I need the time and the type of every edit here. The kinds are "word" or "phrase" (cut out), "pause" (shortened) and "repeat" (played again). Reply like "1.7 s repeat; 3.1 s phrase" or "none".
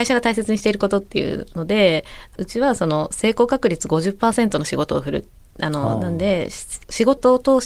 none

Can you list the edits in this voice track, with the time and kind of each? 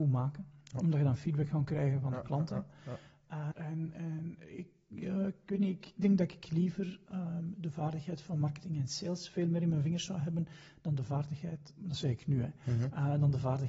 3.5 s word

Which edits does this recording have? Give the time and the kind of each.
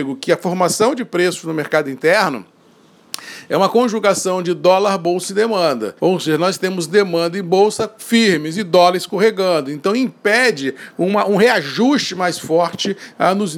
6.0 s pause

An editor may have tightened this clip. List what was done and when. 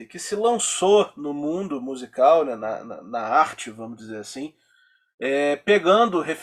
none

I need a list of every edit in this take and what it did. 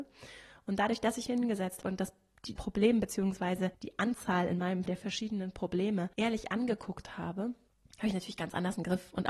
1.3 s word; 1.8 s word; 2.6 s word; 3.7 s pause; 4.9 s word; 6.1 s pause; 7.7 s pause

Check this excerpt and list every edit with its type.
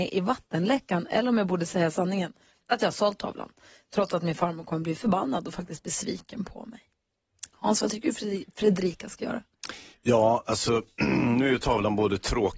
none

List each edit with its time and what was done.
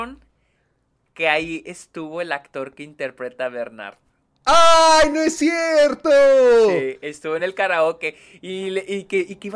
none

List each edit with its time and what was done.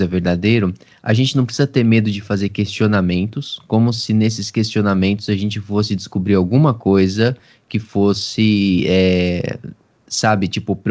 none

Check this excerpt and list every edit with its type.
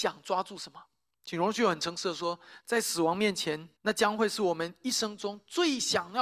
1.1 s pause; 3.8 s pause

